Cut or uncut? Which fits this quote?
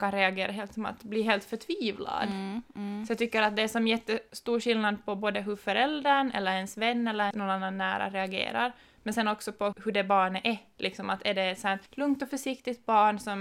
cut